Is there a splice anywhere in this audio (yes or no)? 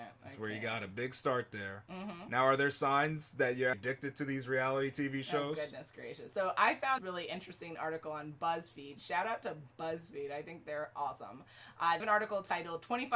yes